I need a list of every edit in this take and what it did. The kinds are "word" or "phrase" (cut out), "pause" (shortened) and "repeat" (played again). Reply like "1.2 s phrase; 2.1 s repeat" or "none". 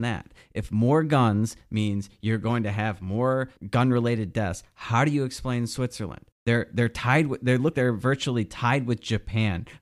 3.6 s pause; 6.3 s pause; 7.7 s word